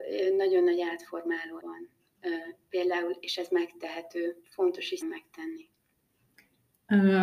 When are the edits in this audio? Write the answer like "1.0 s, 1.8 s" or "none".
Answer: 1.6 s, 4.4 s, 5.0 s